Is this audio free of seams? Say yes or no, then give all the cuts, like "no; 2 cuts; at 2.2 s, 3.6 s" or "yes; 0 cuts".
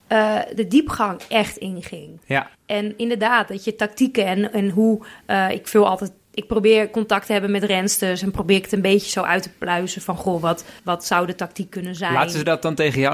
no; 2 cuts; at 2.5 s, 10.8 s